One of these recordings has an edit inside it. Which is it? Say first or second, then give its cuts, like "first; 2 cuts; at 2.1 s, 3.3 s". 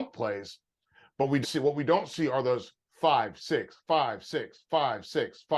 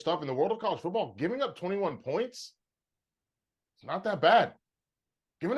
first; 1 cut; at 1.4 s